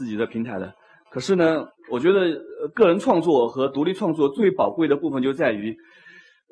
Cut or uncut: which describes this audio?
cut